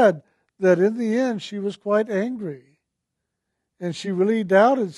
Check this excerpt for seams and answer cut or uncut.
uncut